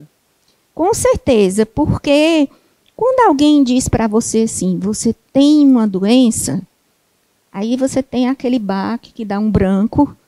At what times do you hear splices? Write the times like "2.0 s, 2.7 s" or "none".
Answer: none